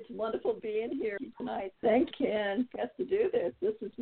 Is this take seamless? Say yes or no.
no